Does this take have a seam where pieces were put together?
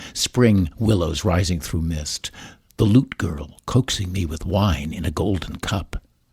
no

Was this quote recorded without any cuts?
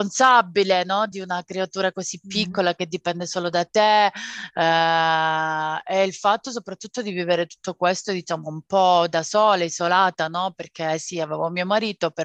yes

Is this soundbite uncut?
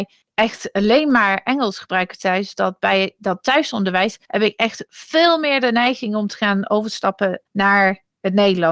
no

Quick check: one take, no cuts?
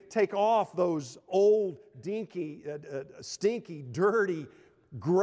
yes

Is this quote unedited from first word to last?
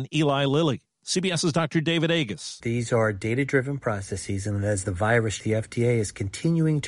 no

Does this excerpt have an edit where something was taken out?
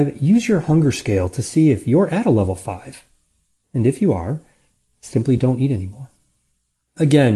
no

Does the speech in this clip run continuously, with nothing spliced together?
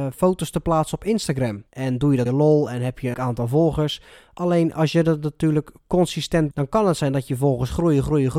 no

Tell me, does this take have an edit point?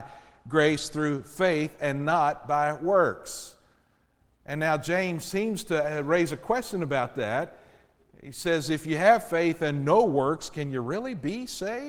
no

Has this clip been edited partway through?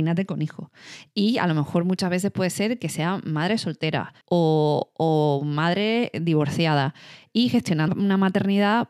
yes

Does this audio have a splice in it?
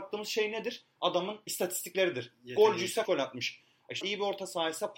yes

